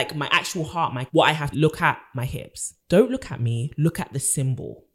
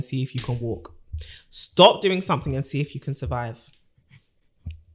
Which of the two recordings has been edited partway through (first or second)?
first